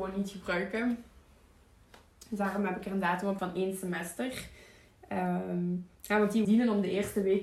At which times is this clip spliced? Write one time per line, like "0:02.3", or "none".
0:03.4
0:05.9
0:06.4